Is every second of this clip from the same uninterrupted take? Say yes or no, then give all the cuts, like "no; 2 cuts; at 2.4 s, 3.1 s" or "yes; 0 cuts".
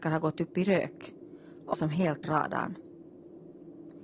no; 2 cuts; at 1.7 s, 2.2 s